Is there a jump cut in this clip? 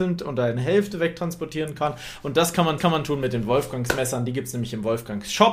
yes; 1 cut; at 2.8 s

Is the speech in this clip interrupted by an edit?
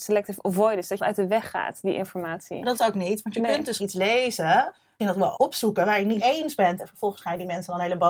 yes; 6 cuts; at 1.0 s, 2.8 s, 3.8 s, 5.0 s, 5.4 s, 6.2 s

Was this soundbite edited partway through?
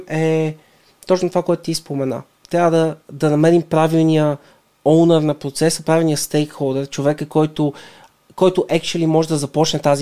no; 0 cuts

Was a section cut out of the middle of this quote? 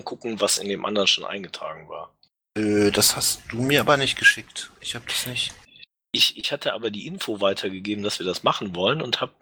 no; 0 cuts

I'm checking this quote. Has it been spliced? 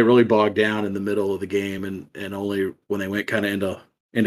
no; 0 cuts

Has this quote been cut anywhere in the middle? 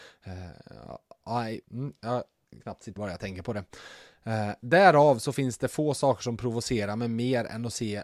yes; 3 cuts; at 1.6 s, 2.6 s, 3.0 s

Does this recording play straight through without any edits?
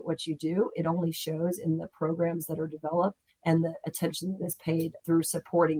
yes; 0 cuts

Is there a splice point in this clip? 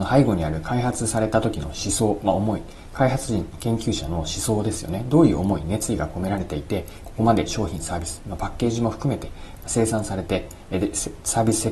no; 0 cuts

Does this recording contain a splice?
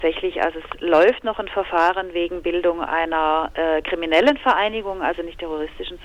no; 0 cuts

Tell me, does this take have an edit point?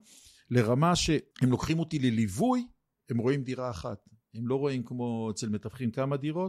yes; 1 cut; at 1.3 s

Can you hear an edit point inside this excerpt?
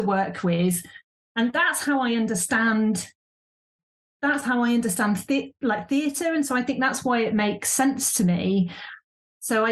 no; 0 cuts

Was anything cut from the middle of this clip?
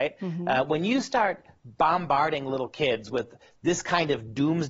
no; 0 cuts

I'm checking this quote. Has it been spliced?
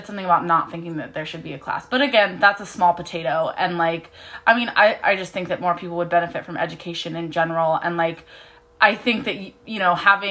no; 0 cuts

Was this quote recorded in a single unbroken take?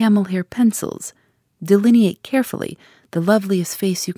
yes; 0 cuts

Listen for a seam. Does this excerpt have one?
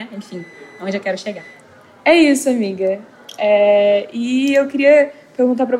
no; 0 cuts

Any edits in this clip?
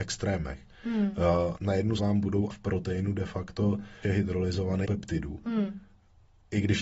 yes; 5 cuts; at 1.6 s, 2.0 s, 2.5 s, 4.0 s, 4.8 s

